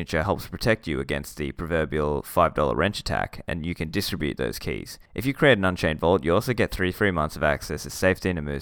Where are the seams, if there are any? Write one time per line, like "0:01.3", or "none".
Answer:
0:05.1